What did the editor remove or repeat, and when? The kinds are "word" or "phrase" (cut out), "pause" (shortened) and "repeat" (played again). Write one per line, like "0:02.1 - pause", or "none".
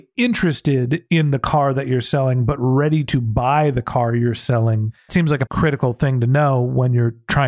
0:05.1 - word
0:05.5 - word